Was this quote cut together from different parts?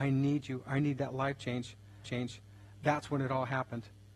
yes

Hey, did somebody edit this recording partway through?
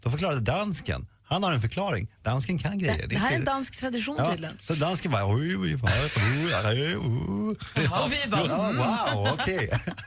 no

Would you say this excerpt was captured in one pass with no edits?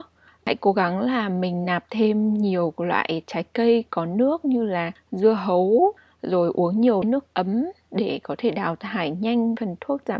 yes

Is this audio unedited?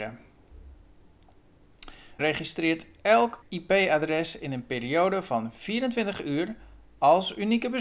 no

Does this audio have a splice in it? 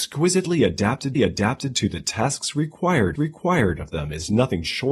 yes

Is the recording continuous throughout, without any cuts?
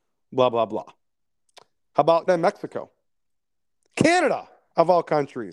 no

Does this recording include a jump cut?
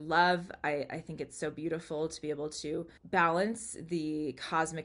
yes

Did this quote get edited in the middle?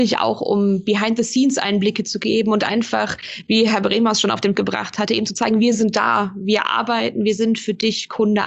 yes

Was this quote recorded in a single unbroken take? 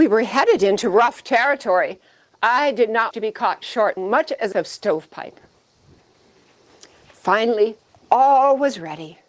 no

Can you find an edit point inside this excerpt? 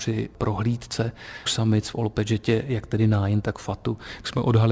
yes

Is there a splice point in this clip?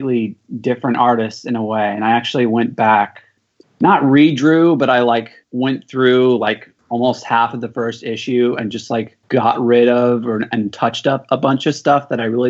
yes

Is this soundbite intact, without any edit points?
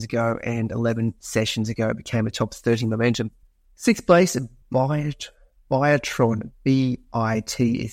no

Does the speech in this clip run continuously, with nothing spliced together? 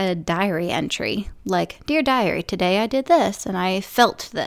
yes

